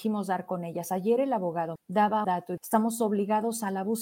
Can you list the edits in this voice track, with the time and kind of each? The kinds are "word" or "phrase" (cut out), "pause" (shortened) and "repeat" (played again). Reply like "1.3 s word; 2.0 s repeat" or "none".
1.8 s word; 2.2 s word; 2.6 s word